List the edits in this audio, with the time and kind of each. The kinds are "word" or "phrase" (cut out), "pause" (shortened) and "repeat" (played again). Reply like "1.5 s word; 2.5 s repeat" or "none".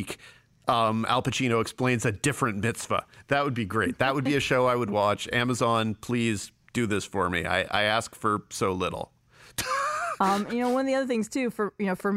none